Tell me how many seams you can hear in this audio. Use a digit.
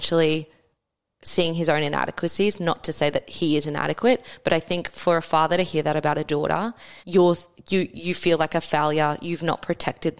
1